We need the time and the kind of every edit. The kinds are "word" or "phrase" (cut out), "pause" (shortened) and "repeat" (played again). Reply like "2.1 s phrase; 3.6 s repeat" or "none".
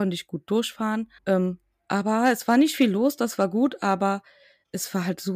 1.2 s pause